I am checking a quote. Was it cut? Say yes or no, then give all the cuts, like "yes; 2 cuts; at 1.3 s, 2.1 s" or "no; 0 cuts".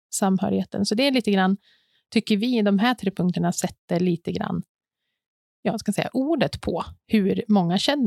no; 0 cuts